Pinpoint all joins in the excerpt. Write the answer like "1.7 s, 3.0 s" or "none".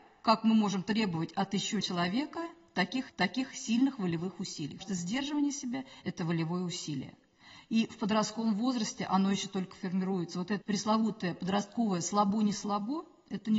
1.8 s, 3.1 s, 4.8 s, 10.6 s